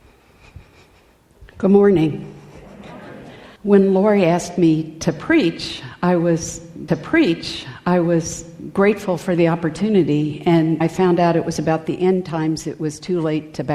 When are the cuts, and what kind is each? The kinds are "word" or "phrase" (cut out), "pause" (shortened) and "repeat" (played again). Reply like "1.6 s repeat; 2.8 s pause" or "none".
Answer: 3.6 s pause; 6.9 s repeat; 10.8 s word